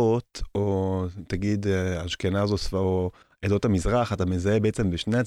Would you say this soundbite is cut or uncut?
uncut